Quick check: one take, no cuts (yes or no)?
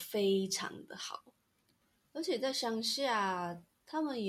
yes